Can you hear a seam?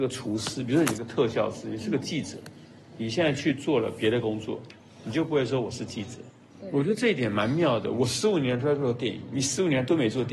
no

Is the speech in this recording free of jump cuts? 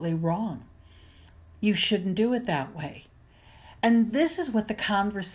yes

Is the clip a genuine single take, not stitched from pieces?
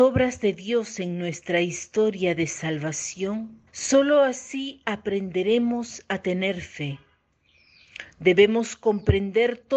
no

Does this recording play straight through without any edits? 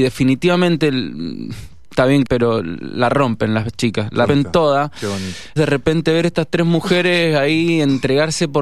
no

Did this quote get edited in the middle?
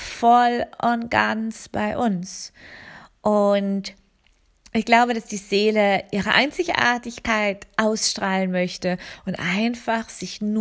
no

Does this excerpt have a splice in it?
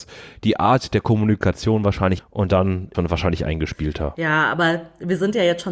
yes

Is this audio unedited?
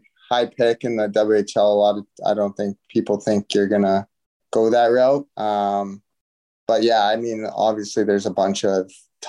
no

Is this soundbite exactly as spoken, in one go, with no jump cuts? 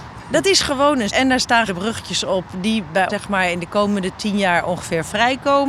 no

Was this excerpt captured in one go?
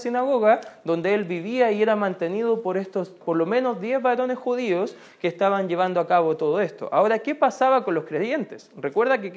yes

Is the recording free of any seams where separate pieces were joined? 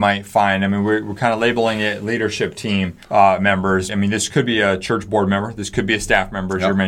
no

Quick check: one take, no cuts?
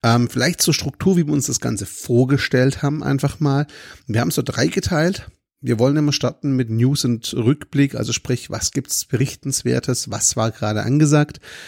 yes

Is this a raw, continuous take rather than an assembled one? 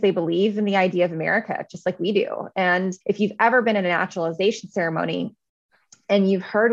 no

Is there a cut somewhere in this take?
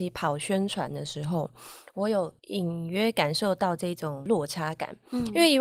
yes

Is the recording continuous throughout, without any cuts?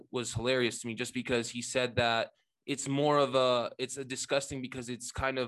yes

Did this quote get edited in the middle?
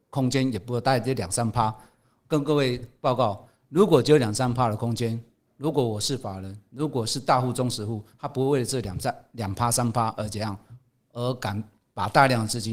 no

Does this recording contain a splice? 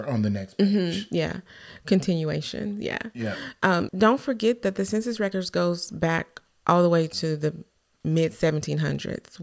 yes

